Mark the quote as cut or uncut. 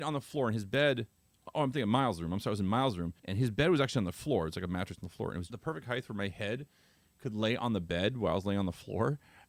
cut